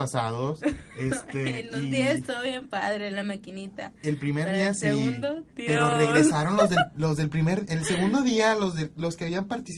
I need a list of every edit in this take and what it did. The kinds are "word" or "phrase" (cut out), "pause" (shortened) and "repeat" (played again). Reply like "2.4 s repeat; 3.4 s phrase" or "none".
3.1 s word; 5.5 s pause